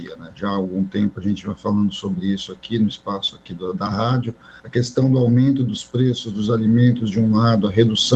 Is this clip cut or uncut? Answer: cut